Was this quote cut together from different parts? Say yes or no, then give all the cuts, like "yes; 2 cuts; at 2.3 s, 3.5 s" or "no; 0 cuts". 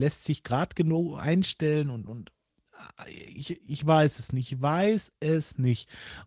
no; 0 cuts